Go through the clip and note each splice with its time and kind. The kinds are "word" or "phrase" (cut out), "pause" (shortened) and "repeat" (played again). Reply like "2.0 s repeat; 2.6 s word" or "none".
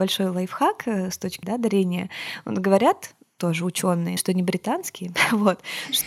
1.4 s word; 4.2 s word